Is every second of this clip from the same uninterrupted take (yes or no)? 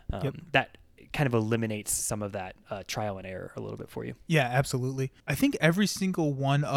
no